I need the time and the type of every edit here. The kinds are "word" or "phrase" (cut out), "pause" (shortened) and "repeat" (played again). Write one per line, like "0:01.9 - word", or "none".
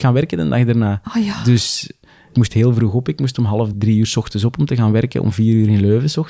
0:03.7 - word